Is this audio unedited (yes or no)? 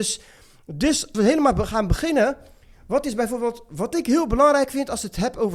no